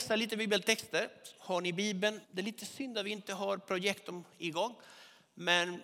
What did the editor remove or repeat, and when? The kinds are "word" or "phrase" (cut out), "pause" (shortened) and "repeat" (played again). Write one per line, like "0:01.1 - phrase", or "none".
0:02.2 - pause